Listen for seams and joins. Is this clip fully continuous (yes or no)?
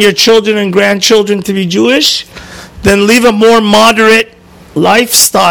yes